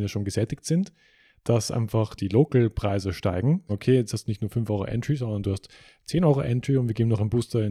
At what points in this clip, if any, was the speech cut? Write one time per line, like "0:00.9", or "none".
0:02.2
0:03.7